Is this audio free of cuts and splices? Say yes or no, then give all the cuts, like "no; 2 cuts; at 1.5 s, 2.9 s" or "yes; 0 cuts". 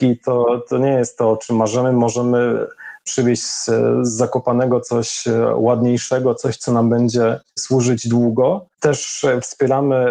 no; 2 cuts; at 7.5 s, 8.7 s